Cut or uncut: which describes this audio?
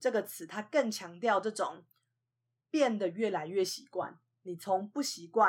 uncut